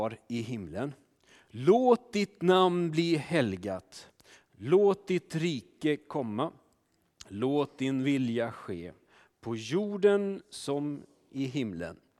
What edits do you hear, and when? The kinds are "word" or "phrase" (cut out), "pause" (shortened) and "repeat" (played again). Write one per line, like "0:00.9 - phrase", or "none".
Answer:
none